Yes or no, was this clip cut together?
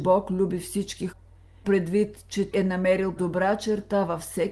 yes